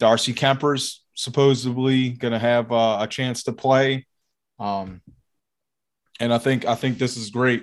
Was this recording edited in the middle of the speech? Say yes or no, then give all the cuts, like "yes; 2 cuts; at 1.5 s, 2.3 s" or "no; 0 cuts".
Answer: no; 0 cuts